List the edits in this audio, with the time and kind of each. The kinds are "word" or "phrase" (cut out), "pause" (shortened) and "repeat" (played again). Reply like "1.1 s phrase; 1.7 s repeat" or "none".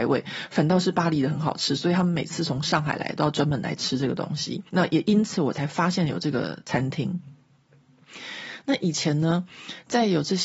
4.7 s pause

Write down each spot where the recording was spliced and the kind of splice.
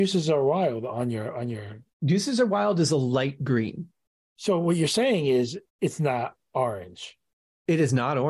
1.9 s pause; 5.7 s pause

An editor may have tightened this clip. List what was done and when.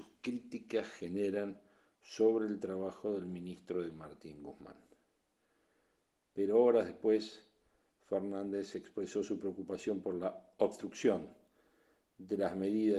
3.9 s word

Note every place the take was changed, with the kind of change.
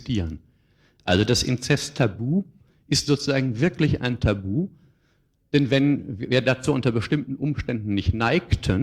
none

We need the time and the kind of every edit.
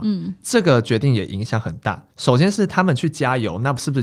2.1 s pause

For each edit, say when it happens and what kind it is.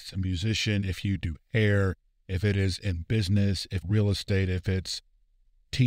3.8 s word

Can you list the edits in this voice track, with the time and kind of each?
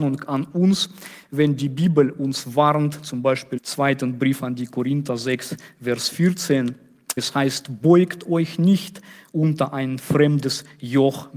3.6 s word; 7.2 s word

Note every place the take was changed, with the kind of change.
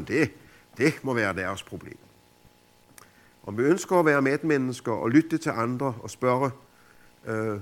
none

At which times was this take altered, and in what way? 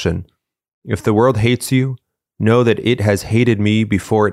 none

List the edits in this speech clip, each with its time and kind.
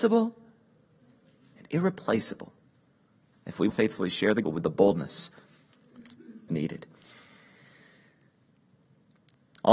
3.7 s word; 4.4 s word; 6.5 s word

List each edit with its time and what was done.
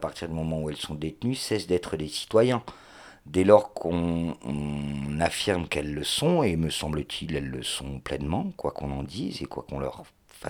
none

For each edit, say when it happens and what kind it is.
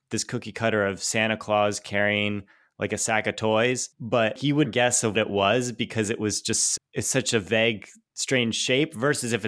4.6 s word; 5.1 s word; 6.8 s word

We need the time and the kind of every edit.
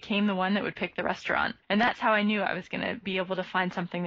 1.6 s pause

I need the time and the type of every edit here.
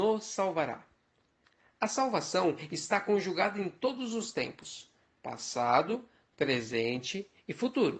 none

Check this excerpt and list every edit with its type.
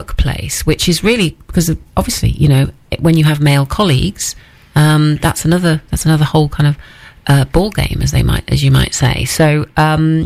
none

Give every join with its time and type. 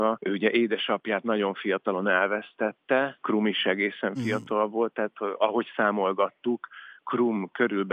none

